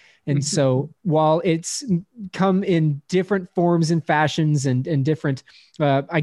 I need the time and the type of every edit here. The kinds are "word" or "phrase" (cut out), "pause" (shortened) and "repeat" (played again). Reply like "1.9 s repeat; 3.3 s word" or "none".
1.0 s pause